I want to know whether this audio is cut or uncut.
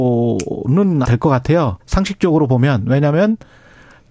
cut